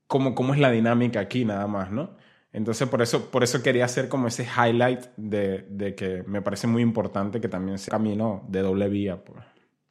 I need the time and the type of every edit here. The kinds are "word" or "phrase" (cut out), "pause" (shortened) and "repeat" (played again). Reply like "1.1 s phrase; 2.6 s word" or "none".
7.9 s word

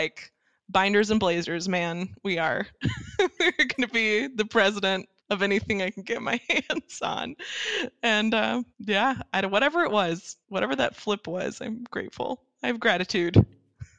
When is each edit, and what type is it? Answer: 5.2 s pause; 6.4 s pause; 8.7 s pause; 10.4 s pause

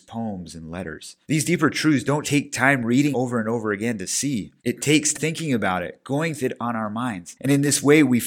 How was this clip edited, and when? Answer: 1.2 s pause; 2.2 s word; 3.1 s word; 4.6 s pause; 5.1 s word; 6.4 s phrase

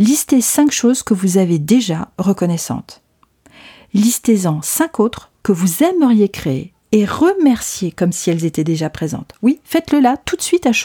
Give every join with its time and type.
2.2 s phrase; 6.8 s pause

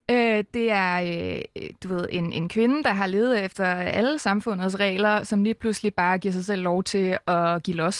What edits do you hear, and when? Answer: none

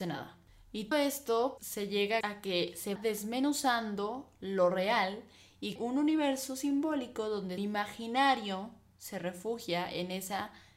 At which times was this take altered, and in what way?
0.9 s word; 1.6 s word; 2.2 s word; 3.0 s word; 5.8 s word; 7.6 s word

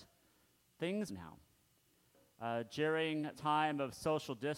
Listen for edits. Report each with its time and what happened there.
1.1 s phrase; 3.3 s word

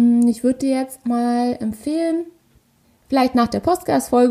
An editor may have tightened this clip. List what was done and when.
1.0 s word; 2.8 s pause

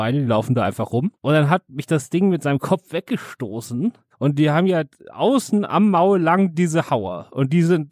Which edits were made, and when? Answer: none

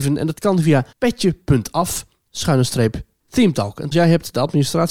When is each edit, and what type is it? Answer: 0.9 s pause; 3.9 s word

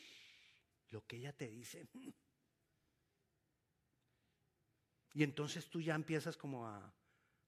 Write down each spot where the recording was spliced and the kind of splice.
none

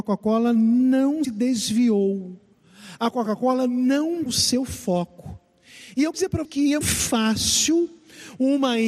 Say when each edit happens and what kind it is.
1.2 s word; 4.3 s word; 6.1 s word; 6.4 s word; 6.8 s word

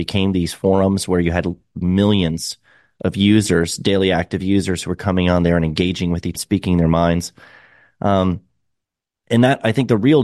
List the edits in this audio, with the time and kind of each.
1.8 s word; 6.4 s phrase

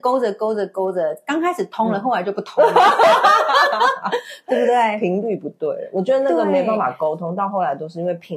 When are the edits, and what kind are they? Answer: none

